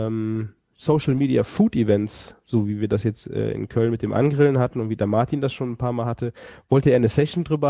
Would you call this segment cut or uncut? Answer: uncut